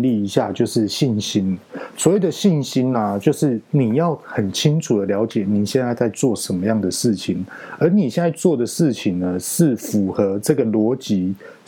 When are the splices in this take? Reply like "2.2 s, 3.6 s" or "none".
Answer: none